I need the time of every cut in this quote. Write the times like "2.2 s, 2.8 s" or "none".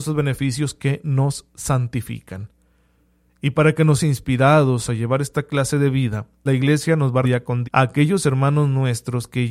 4.0 s, 6.5 s, 7.2 s, 7.6 s